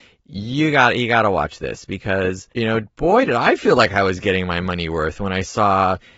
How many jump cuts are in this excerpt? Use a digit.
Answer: 1